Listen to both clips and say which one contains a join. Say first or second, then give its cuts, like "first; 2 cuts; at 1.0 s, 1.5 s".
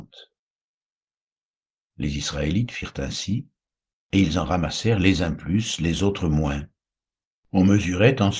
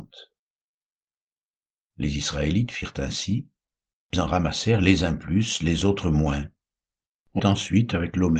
second; 2 cuts; at 4.1 s, 7.4 s